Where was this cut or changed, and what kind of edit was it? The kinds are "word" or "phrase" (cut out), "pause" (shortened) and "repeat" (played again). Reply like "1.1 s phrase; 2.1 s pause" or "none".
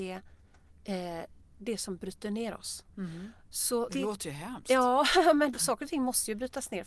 1.5 s pause; 2.9 s pause; 3.9 s word; 5.5 s phrase